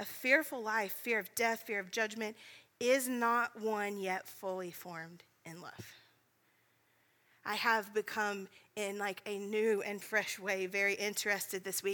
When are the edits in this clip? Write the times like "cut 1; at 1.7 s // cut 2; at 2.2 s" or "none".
none